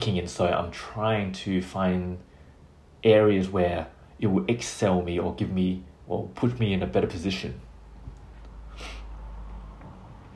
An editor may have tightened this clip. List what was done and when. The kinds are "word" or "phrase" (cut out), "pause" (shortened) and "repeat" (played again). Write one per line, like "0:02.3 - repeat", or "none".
0:06.0 - pause